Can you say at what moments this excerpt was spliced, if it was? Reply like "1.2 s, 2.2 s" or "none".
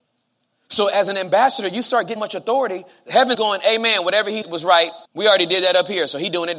2.2 s, 3.3 s, 4.4 s, 5.0 s

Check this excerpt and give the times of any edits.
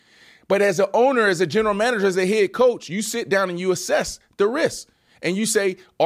none

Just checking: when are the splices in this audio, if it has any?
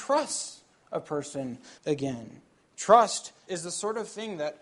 1.8 s, 3.5 s

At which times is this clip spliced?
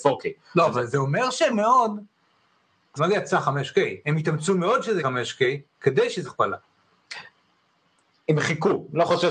1.5 s, 3.0 s, 5.0 s, 6.2 s

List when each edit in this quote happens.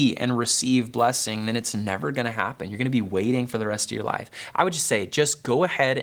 none

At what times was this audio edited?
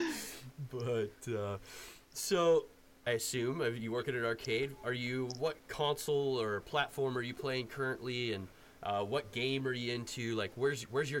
3.1 s, 5.6 s

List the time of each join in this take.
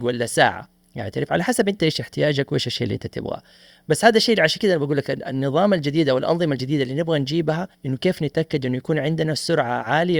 7.7 s

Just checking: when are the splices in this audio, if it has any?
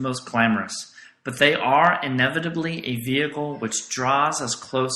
none

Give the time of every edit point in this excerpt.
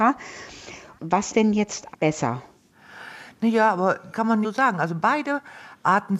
1.3 s, 1.9 s, 4.1 s, 4.4 s

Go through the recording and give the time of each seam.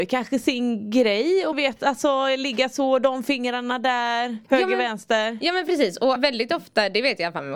1.5 s, 4.4 s, 6.2 s

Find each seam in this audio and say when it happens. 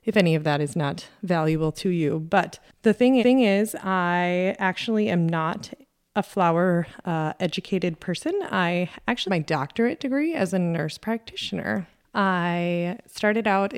3.2 s, 9.3 s

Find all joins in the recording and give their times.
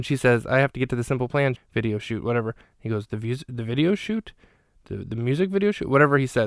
1.6 s

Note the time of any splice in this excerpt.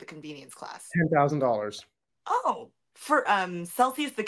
3.3 s

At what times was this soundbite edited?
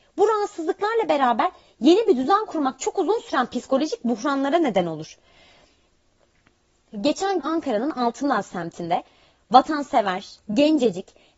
7.4 s

